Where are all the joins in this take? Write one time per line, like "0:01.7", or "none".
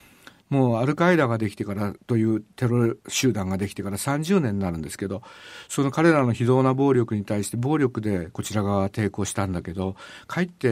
0:02.0
0:03.0